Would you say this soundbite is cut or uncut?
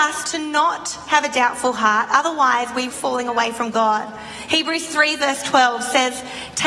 cut